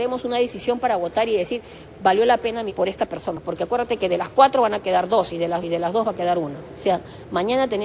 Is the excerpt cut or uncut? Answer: cut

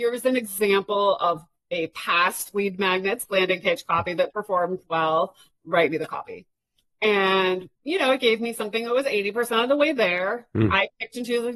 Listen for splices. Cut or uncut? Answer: cut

